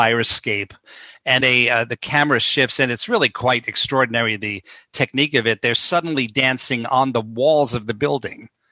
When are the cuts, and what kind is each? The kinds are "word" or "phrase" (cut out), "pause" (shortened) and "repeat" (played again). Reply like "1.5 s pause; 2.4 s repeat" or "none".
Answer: 1.4 s word